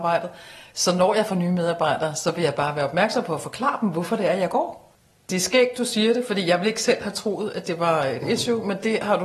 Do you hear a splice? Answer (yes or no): no